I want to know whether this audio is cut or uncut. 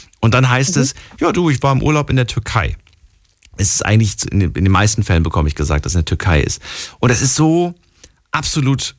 uncut